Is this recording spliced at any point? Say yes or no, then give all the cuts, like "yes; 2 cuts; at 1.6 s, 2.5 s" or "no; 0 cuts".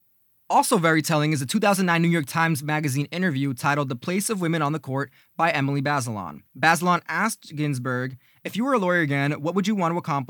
yes; 1 cut; at 6.5 s